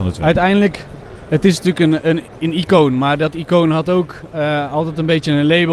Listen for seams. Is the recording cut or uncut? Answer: uncut